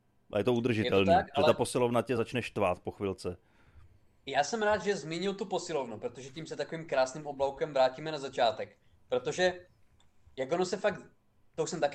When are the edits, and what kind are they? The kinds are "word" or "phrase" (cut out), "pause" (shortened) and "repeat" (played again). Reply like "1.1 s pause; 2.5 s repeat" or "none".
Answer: none